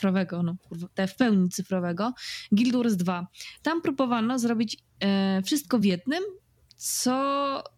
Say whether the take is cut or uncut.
uncut